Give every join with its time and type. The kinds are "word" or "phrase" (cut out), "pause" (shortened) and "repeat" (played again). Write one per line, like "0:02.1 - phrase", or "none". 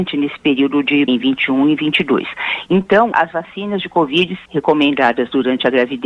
0:01.1 - word
0:03.1 - word
0:04.5 - word